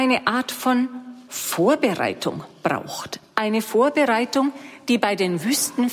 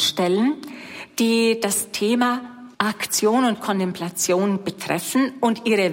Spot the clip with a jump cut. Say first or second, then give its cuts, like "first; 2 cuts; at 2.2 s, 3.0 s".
second; 1 cut; at 2.7 s